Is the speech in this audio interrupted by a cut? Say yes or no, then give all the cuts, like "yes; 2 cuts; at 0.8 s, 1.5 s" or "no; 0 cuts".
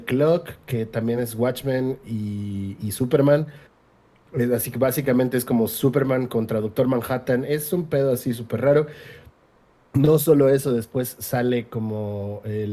no; 0 cuts